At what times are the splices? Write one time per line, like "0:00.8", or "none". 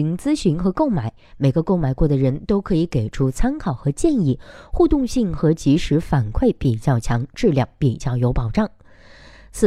none